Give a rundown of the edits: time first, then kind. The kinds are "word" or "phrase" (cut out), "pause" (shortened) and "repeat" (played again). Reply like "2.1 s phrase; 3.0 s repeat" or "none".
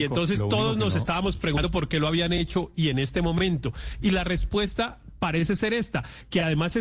none